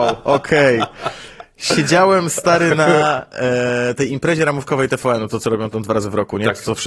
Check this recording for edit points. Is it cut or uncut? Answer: cut